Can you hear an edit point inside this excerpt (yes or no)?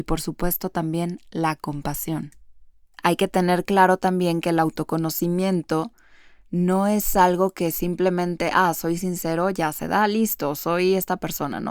no